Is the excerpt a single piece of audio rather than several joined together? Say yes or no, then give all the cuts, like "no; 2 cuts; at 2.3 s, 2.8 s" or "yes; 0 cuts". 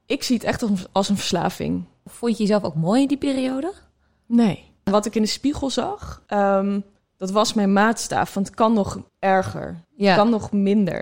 no; 4 cuts; at 4.8 s, 6.3 s, 9.1 s, 9.8 s